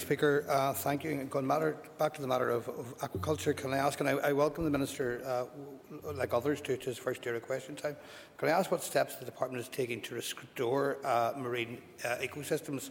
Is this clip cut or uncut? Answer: uncut